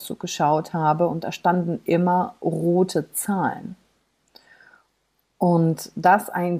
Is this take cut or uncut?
uncut